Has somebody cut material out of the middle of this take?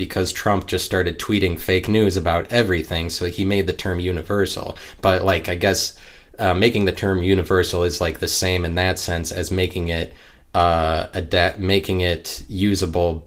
no; 0 cuts

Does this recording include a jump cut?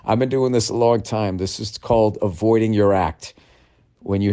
no; 0 cuts

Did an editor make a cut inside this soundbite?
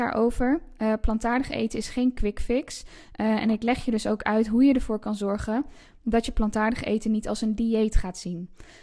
no; 0 cuts

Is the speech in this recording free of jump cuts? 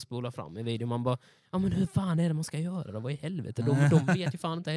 yes; 0 cuts

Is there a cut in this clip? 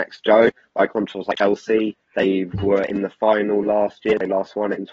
no; 0 cuts

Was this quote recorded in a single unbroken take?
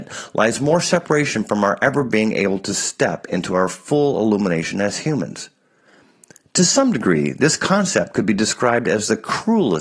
yes; 0 cuts

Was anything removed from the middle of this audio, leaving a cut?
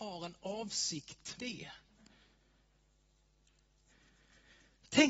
yes; 1 cut; at 1.4 s

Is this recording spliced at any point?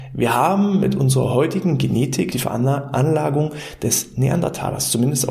yes; 1 cut; at 2.3 s

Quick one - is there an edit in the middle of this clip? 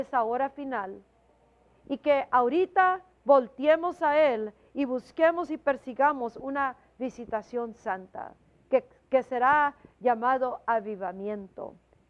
no; 0 cuts

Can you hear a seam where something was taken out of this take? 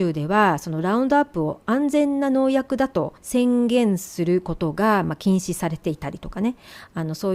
yes; 1 cut; at 3.2 s

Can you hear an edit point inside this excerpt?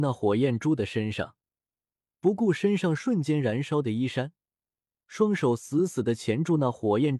no; 0 cuts

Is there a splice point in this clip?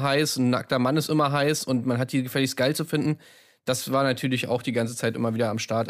no; 0 cuts

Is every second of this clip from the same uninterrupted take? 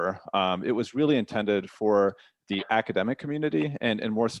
yes; 0 cuts

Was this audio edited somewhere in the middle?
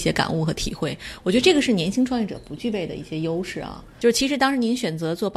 no; 0 cuts

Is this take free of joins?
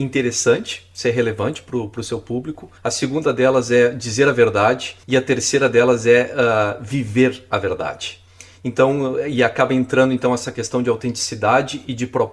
no; 2 cuts; at 2.8 s, 5.0 s

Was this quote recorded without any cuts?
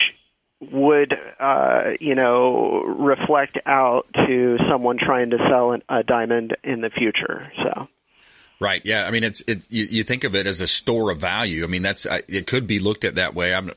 yes; 0 cuts

